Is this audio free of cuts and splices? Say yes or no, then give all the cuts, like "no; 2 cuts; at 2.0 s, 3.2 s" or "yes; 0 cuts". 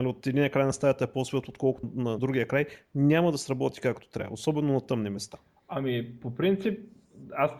no; 2 cuts; at 1.8 s, 2.2 s